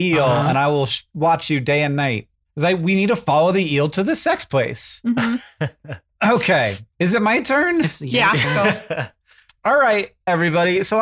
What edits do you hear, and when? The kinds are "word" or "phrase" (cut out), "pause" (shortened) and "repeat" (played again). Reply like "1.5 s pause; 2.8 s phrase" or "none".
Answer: none